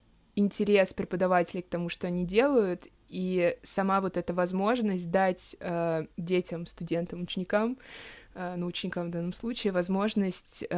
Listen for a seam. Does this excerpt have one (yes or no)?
yes